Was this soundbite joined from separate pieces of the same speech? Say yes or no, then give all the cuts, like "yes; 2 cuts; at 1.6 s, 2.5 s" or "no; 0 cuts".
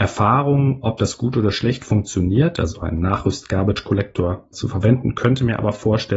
yes; 1 cut; at 4.5 s